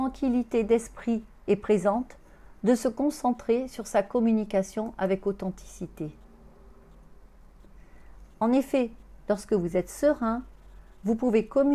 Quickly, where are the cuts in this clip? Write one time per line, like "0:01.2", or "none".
none